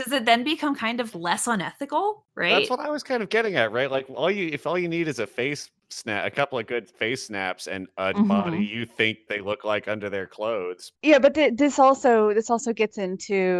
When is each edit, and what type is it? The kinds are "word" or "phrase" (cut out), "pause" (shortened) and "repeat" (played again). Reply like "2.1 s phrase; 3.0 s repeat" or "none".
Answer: 1.1 s word; 9.3 s word; 11.0 s pause